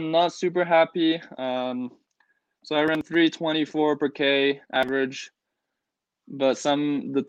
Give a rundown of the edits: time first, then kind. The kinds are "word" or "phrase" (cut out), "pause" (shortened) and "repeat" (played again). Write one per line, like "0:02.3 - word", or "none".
none